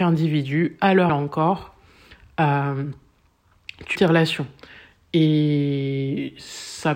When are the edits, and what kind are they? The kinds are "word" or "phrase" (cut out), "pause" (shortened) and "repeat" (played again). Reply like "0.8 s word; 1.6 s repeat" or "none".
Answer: 1.1 s word; 4.0 s word